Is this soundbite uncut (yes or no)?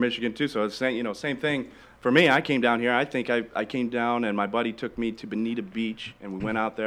yes